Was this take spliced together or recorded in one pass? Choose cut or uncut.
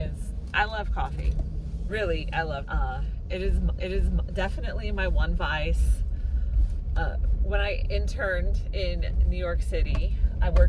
cut